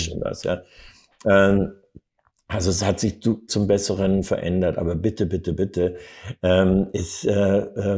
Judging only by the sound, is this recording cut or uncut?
cut